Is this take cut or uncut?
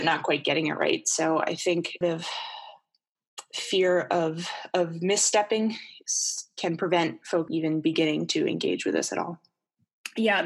cut